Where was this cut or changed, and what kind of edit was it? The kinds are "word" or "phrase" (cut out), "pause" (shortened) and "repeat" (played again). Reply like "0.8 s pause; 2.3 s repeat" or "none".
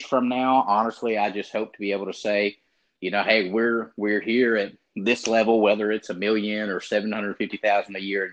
none